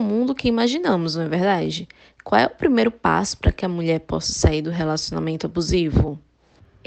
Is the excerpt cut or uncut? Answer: uncut